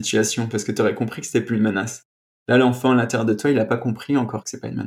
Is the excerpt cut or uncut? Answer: uncut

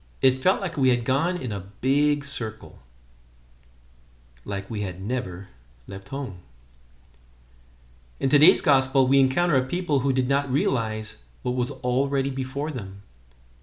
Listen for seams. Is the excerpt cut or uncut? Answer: uncut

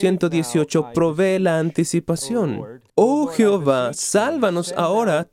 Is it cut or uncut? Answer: cut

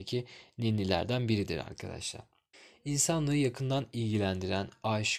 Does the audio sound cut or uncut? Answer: cut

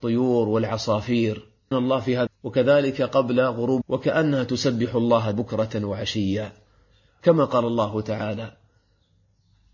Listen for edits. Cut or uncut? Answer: cut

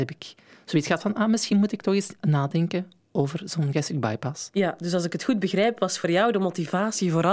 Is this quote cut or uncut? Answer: uncut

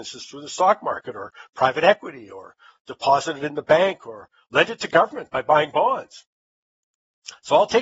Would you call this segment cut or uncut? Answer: uncut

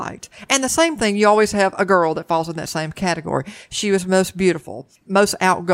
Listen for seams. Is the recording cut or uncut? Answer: uncut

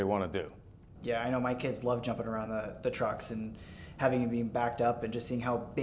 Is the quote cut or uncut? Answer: uncut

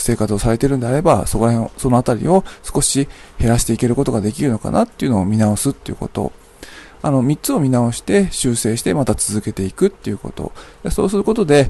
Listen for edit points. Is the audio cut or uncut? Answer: uncut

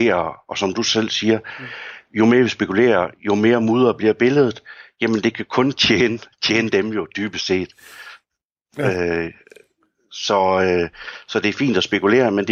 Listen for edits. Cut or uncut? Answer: uncut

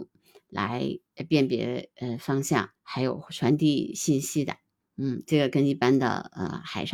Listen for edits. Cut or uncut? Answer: cut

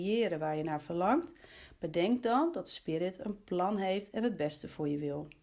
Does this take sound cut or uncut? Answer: uncut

